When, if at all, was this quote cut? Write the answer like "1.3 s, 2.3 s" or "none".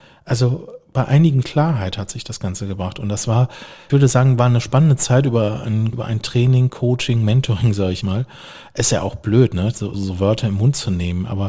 1.4 s, 3.9 s, 5.9 s, 8.0 s, 9.9 s